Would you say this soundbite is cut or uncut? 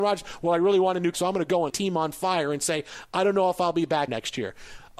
cut